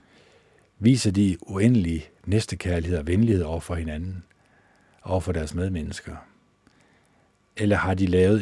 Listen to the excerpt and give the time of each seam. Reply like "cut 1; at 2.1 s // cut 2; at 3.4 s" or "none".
none